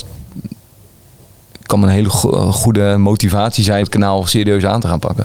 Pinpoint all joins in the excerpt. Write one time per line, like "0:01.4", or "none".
0:03.8